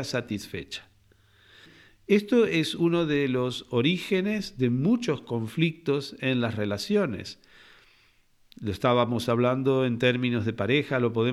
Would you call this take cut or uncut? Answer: uncut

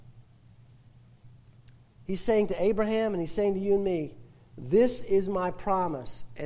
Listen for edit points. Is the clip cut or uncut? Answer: uncut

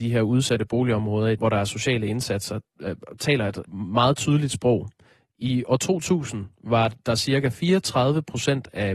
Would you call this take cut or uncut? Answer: cut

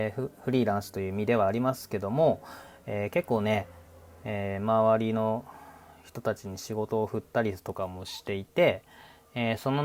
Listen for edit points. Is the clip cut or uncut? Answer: uncut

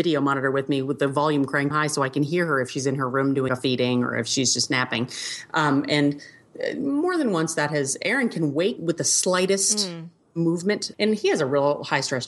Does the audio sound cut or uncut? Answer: cut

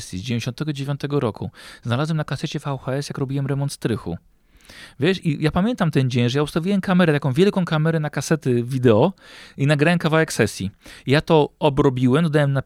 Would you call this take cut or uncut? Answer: uncut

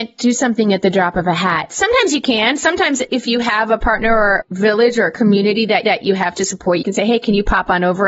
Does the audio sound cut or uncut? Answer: cut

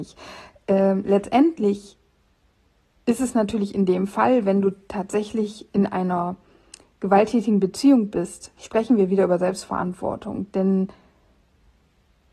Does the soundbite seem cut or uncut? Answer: uncut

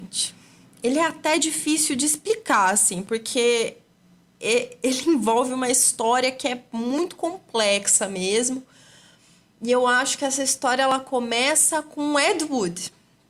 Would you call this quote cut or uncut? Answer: uncut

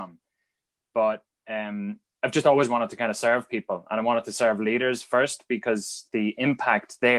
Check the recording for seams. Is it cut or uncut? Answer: uncut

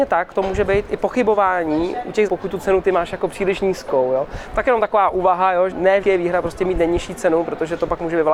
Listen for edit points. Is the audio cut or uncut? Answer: cut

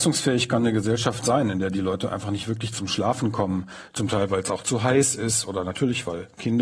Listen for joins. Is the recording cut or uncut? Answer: uncut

